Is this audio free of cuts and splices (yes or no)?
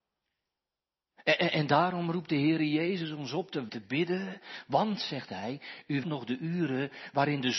no